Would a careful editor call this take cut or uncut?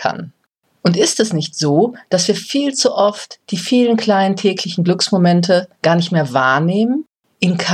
cut